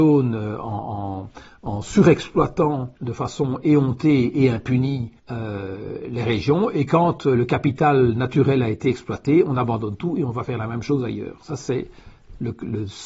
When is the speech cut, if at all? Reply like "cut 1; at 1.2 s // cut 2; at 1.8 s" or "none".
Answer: cut 1; at 3.0 s // cut 2; at 5.2 s